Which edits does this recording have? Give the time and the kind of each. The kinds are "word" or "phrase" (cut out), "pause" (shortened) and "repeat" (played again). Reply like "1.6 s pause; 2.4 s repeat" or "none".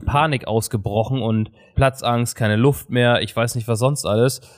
1.7 s word

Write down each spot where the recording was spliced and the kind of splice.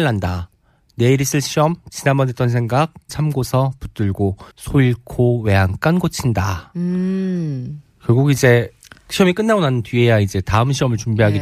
3.1 s word; 4.5 s pause

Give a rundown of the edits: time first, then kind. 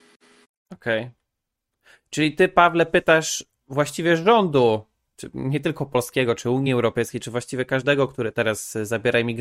none

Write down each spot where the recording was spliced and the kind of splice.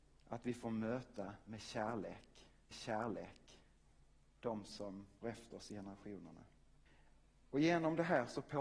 2.7 s repeat; 5.2 s word; 6.9 s pause

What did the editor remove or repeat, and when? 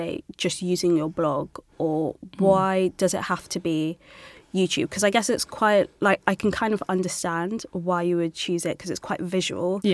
none

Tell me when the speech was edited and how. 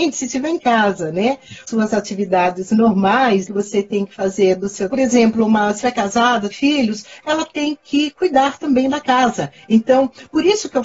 1.7 s phrase; 3.5 s word; 4.9 s phrase; 5.8 s phrase; 6.5 s word

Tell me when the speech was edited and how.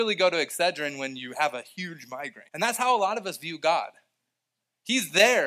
2.5 s pause

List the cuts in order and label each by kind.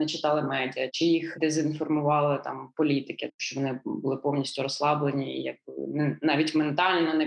none

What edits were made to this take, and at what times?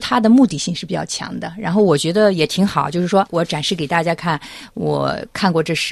3.3 s word

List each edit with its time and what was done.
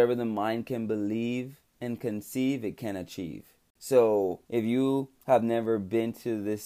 1.7 s pause; 4.4 s pause

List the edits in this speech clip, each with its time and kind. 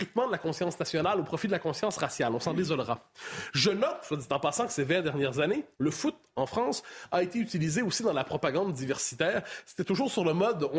5.7 s pause

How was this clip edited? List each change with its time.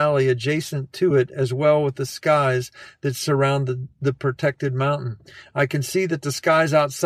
none

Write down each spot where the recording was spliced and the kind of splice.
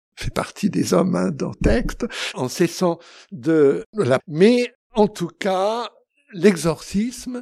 1.5 s word; 2.3 s word; 4.2 s word

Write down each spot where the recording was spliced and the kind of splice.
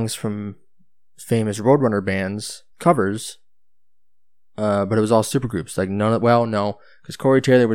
2.7 s pause

